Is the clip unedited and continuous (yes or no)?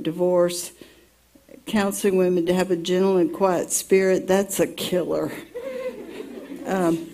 yes